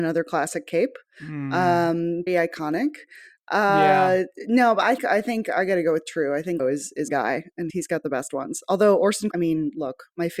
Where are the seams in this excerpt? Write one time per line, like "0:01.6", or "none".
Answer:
0:02.3
0:05.0
0:06.6
0:07.1
0:07.7
0:09.3